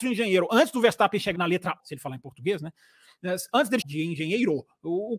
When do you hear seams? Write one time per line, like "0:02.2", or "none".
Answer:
0:01.4
0:01.8
0:03.8